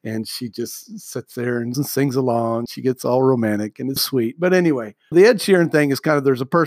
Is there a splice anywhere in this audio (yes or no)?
yes